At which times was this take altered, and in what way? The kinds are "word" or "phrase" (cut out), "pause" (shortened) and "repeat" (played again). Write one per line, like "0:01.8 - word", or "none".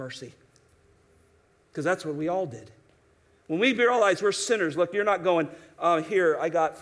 none